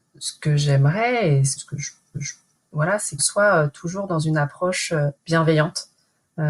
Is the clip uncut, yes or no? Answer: no